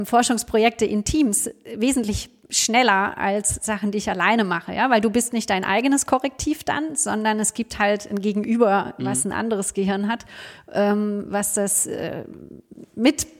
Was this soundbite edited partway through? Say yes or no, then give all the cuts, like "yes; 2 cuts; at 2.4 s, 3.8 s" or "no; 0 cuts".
no; 0 cuts